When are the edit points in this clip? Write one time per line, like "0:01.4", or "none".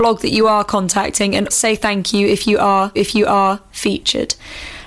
0:01.5
0:02.9